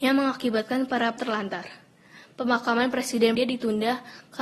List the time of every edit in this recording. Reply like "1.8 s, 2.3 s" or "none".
1.2 s, 3.4 s